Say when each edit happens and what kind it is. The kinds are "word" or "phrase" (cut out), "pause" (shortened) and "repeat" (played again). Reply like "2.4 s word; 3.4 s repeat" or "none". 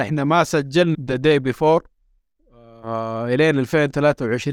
0.9 s word